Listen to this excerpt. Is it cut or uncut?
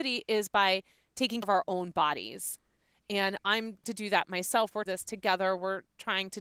cut